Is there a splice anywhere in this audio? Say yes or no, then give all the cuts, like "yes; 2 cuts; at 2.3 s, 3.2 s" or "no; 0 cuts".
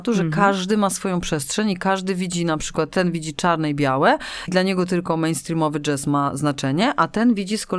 yes; 1 cut; at 4.5 s